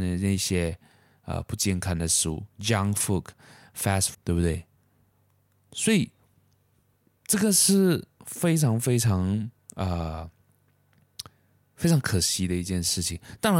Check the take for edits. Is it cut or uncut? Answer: cut